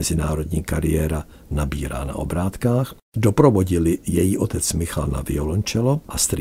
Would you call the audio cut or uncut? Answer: uncut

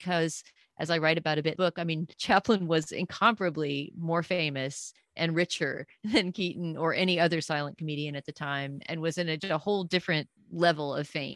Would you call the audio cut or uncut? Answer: cut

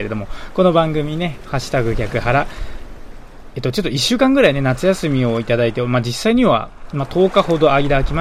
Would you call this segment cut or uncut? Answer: uncut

